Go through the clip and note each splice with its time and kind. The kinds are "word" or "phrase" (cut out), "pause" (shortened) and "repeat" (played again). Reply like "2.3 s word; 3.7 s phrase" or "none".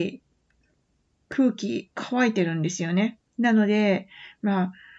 3.3 s pause

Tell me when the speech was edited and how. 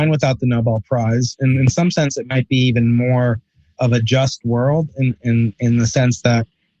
3.8 s word

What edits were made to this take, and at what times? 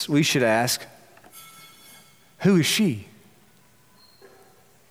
none

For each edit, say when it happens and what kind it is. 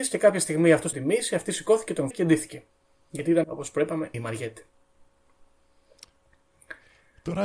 0.9 s word; 2.1 s word; 3.4 s word; 4.1 s word

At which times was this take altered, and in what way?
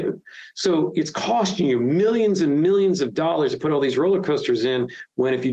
none

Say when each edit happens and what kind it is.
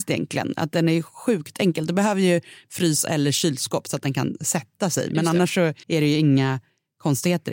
5.8 s pause

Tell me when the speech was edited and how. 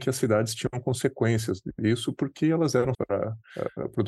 2.9 s word

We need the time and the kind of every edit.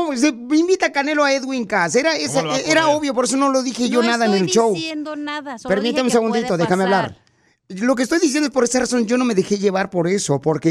none

